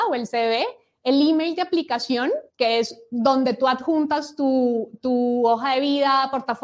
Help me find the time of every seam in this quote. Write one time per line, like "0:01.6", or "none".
0:02.5